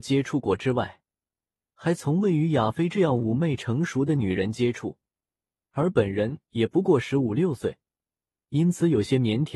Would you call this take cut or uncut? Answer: uncut